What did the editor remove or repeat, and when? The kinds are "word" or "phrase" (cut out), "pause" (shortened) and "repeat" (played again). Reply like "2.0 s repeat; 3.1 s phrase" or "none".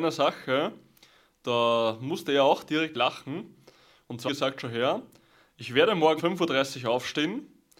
2.9 s word; 4.3 s phrase; 6.2 s word